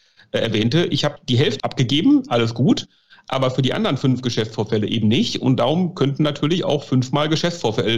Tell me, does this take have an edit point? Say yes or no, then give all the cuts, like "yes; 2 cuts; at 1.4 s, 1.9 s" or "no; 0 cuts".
yes; 1 cut; at 1.6 s